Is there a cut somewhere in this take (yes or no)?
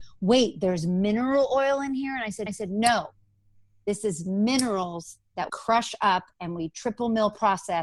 yes